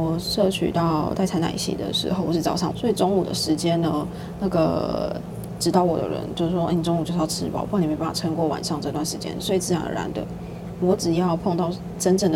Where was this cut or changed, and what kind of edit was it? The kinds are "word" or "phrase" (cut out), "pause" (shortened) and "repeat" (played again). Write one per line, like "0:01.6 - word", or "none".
0:02.7 - phrase